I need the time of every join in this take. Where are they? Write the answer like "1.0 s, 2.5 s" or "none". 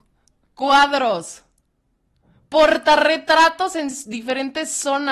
none